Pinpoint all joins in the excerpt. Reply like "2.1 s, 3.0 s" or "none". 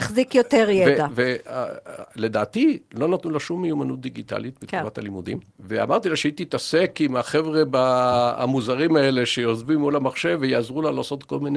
5.5 s